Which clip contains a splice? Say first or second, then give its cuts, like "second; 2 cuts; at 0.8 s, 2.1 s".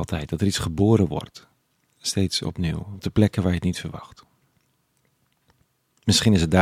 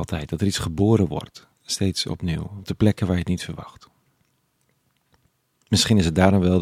second; 1 cut; at 1.5 s